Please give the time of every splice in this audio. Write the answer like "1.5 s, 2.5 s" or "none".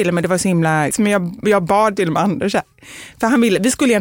0.9 s